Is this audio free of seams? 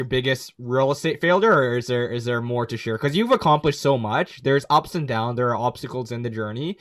yes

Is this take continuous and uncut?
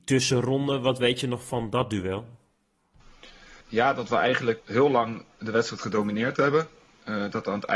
no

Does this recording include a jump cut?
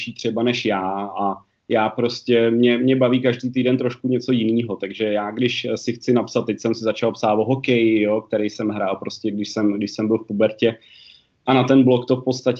no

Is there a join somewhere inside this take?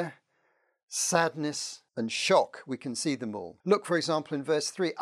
yes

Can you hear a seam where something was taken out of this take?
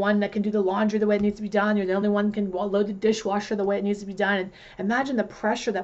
no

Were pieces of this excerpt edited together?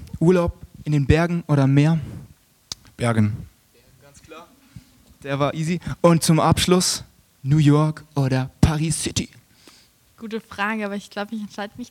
no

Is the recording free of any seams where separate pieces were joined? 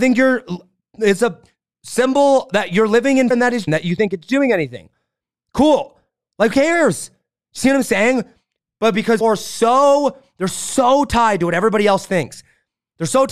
no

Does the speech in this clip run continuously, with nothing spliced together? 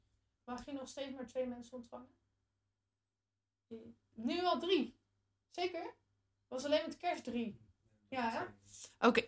yes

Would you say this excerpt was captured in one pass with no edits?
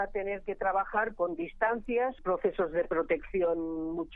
no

